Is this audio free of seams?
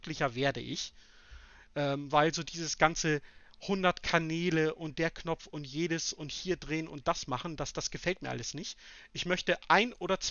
yes; 0 cuts

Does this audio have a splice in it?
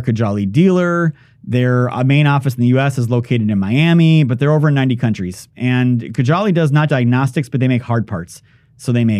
yes; 1 cut; at 6.9 s

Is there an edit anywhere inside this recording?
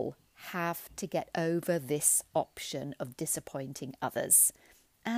no; 0 cuts

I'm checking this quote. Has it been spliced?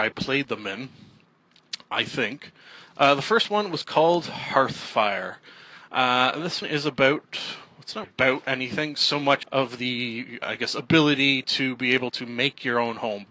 yes; 4 cuts; at 6.6 s, 8.0 s, 9.4 s, 10.4 s

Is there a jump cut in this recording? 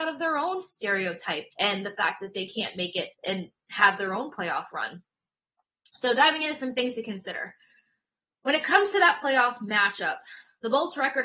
yes; 2 cuts; at 1.5 s, 3.1 s

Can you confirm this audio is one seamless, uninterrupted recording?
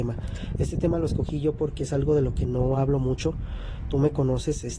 yes; 0 cuts

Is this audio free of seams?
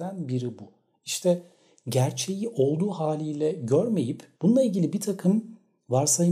no; 1 cut; at 4.3 s

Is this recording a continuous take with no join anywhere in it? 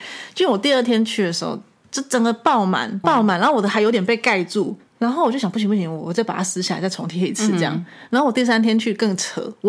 no; 2 cuts; at 3.0 s, 4.8 s

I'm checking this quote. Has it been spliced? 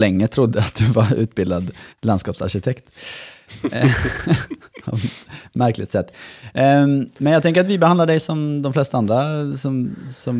yes; 1 cut; at 1.9 s

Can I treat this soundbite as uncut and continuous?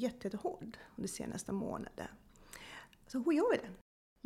yes; 0 cuts

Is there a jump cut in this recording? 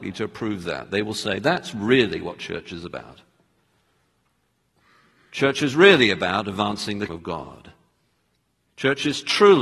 yes; 1 cut; at 7.1 s

